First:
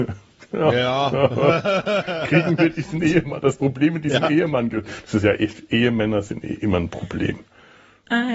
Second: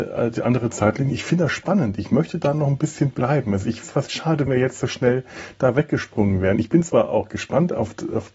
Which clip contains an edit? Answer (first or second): second